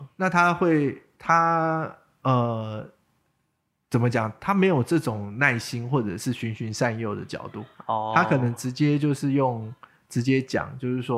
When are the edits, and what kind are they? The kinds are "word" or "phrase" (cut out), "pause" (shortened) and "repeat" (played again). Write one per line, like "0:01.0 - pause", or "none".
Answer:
0:07.7 - pause